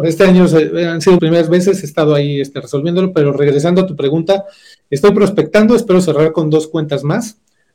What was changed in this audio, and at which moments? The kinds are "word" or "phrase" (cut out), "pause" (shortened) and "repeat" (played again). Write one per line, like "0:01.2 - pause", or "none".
0:01.2 - word